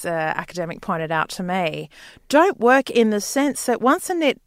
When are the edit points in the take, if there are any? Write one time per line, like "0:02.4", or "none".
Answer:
none